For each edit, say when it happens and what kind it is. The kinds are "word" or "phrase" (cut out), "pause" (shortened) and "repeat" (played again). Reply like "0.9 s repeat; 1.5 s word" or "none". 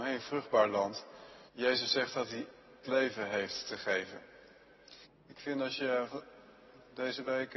1.5 s pause; 2.8 s word; 5.0 s pause